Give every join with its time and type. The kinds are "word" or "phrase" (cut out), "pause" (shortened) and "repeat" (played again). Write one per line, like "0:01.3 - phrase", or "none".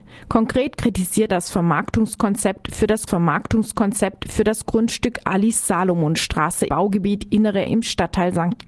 0:01.3 - word
0:03.1 - repeat
0:06.7 - word
0:07.7 - word

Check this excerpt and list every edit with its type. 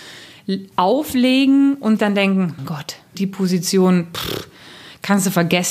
0:02.0 - word
0:02.6 - word
0:03.1 - word

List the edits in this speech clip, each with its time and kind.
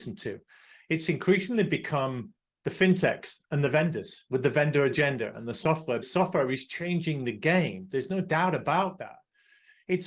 0:06.0 - word

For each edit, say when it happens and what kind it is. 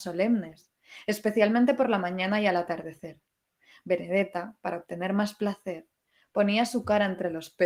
none

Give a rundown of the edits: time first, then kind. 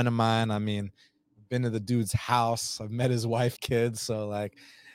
0:03.6 - word

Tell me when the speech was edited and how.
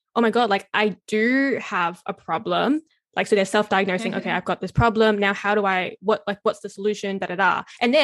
none

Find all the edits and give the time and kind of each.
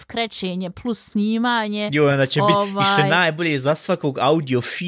none

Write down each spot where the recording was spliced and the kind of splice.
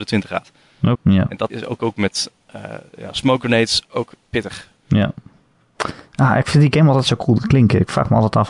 0:00.9 - word
0:01.5 - word
0:04.8 - pause

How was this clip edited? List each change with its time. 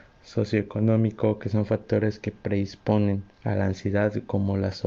0:03.3 - pause

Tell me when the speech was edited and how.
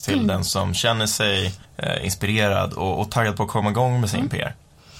0:01.6 - pause

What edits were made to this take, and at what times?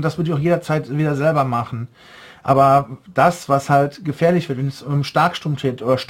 none

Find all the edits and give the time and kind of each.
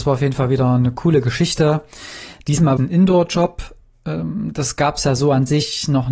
0:02.8 - word

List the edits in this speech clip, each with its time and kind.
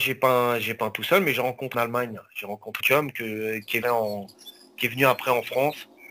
0:01.7 - phrase
0:02.8 - word
0:03.8 - phrase

